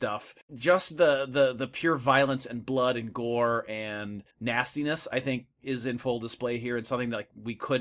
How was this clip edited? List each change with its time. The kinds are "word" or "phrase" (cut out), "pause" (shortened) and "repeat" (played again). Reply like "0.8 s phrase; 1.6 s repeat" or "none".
4.3 s pause; 5.5 s pause